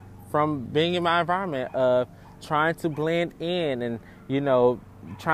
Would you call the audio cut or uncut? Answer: uncut